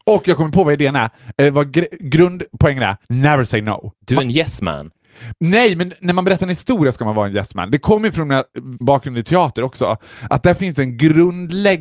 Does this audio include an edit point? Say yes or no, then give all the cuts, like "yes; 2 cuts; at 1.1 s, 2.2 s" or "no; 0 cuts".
yes; 3 cuts; at 3.0 s, 4.0 s, 8.8 s